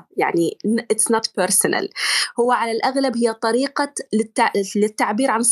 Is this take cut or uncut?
uncut